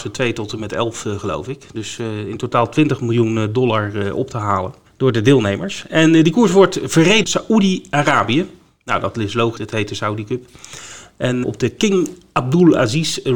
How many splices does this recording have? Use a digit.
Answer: 3